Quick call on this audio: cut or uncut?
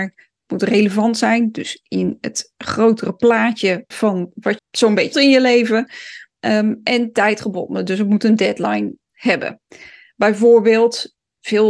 cut